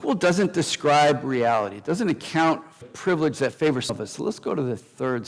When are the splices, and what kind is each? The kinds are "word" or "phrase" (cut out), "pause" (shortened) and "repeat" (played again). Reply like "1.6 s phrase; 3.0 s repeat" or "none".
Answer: 2.8 s word; 3.9 s word